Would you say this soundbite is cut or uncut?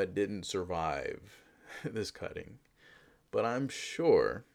uncut